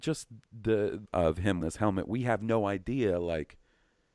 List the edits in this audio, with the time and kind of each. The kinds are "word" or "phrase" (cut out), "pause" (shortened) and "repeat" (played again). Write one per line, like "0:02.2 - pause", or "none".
0:01.1 - phrase
0:01.6 - word